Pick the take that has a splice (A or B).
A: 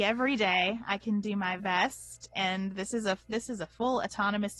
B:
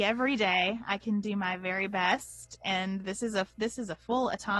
A